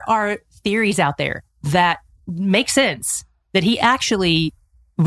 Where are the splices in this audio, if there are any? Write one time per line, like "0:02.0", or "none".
none